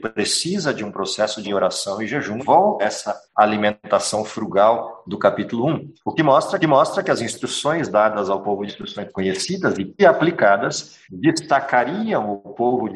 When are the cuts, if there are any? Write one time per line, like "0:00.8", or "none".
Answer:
0:01.4
0:02.4
0:02.8
0:03.2
0:06.0
0:06.6
0:08.7
0:10.0
0:11.0